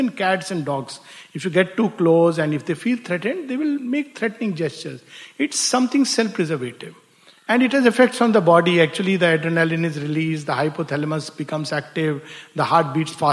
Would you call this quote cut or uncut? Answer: uncut